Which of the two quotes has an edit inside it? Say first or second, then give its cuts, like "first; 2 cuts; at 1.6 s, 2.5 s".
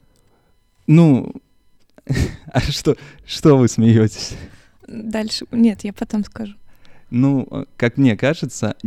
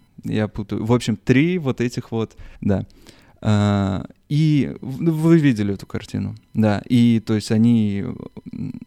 second; 1 cut; at 2.6 s